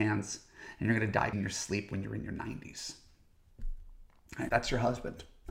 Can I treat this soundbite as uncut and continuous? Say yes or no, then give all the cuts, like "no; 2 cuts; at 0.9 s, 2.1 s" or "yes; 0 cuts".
no; 2 cuts; at 1.3 s, 4.5 s